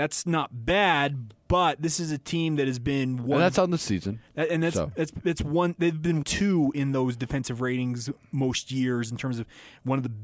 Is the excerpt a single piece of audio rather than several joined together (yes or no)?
no